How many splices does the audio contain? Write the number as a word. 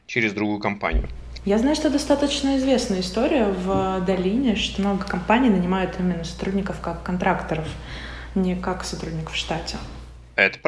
one